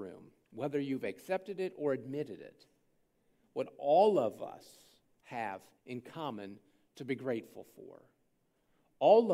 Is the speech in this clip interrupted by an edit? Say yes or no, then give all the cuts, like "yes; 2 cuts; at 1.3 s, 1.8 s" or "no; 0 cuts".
yes; 1 cut; at 5.8 s